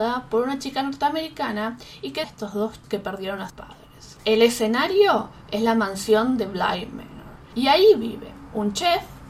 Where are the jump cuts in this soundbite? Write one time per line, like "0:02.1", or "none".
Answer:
0:02.2
0:02.8
0:03.5